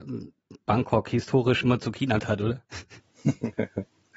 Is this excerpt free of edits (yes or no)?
no